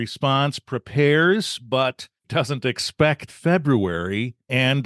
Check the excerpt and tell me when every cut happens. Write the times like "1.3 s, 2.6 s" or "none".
2.2 s, 3.3 s